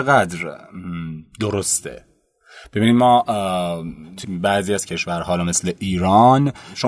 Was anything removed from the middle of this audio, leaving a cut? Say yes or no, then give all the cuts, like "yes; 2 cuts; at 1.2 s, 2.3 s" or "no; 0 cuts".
yes; 1 cut; at 4.2 s